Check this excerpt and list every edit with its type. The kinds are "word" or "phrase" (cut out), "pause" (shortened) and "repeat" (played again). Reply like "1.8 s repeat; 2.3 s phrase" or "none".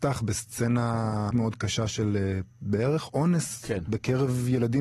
1.3 s word; 2.5 s pause

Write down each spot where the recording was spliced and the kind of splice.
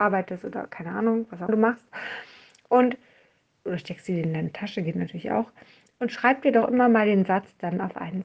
1.5 s word

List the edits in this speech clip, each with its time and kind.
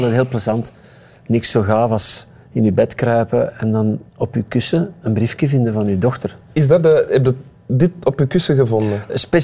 4.1 s pause

